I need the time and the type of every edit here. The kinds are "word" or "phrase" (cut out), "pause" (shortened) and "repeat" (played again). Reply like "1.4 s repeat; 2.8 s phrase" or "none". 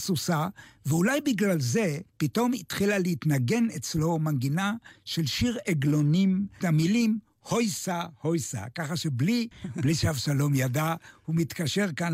2.1 s pause; 6.6 s phrase; 9.5 s word